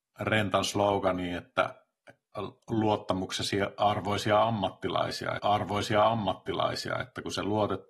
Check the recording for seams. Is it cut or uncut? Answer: cut